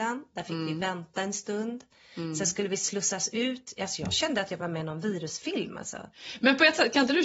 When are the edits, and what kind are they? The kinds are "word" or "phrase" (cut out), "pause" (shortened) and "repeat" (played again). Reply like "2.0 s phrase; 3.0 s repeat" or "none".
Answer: none